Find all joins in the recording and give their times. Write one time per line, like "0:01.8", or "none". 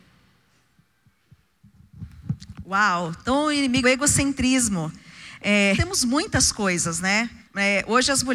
0:03.8
0:05.7
0:07.4